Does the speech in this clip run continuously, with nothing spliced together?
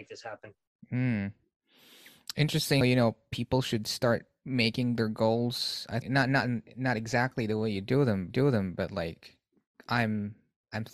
no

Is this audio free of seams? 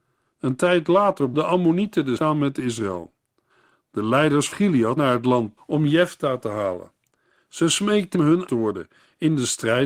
no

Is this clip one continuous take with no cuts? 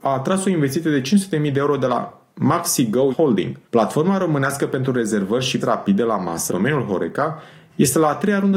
no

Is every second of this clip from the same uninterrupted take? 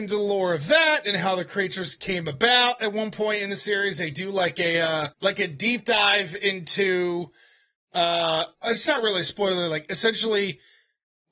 no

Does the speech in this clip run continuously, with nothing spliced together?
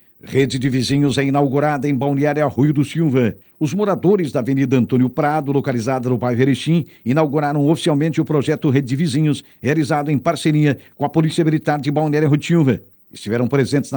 yes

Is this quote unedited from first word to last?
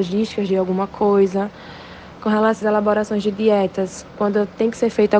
no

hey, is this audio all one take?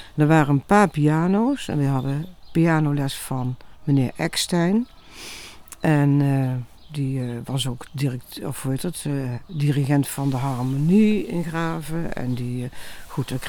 yes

